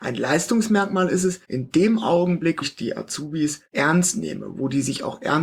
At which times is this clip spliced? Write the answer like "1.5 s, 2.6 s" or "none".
1.4 s, 2.6 s, 3.7 s